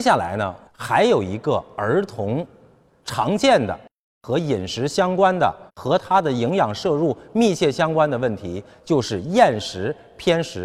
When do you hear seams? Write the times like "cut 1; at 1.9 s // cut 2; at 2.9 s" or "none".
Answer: cut 1; at 5.7 s